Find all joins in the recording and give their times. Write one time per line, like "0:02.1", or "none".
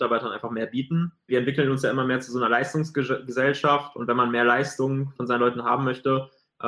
0:05.2